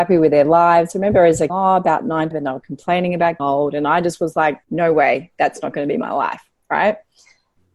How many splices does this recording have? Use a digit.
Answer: 4